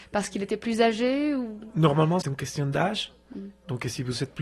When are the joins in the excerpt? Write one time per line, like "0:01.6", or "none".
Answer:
0:02.2